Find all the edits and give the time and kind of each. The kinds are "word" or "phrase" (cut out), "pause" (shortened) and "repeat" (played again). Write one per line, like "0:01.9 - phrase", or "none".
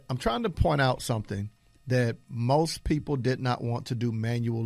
none